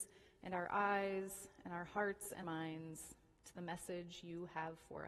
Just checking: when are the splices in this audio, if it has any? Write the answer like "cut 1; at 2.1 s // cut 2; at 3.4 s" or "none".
cut 1; at 2.4 s